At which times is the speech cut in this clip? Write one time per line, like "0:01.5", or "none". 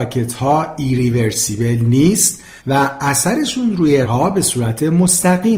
0:02.6
0:04.0